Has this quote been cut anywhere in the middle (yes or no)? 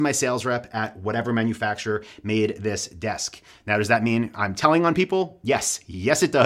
no